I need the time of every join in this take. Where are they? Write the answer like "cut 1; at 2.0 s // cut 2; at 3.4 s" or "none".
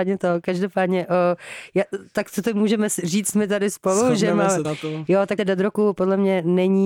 cut 1; at 4.6 s // cut 2; at 5.4 s